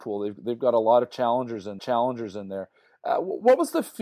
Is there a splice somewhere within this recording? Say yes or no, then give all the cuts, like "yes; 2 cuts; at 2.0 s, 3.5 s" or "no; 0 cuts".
yes; 1 cut; at 1.8 s